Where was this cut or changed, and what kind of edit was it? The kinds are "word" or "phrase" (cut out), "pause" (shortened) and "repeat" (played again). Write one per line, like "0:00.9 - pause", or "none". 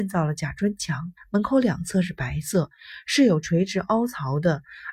0:01.2 - pause